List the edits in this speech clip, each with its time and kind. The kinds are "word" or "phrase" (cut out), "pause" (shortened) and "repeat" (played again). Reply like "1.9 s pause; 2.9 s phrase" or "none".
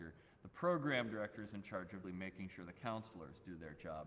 2.0 s word